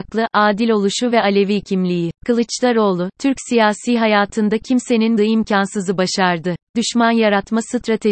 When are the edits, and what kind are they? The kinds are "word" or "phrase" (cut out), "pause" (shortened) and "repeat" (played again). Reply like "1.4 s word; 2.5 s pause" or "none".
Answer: 2.2 s pause; 5.2 s word; 6.7 s word